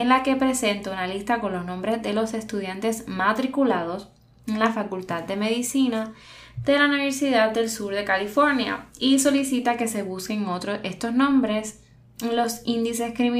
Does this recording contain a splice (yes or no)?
no